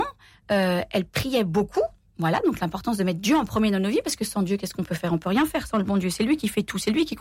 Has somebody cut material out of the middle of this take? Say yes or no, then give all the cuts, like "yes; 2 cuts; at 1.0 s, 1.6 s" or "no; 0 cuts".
no; 0 cuts